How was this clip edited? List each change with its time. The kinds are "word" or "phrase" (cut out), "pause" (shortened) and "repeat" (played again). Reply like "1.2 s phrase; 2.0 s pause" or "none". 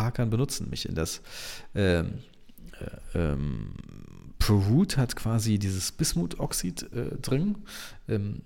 none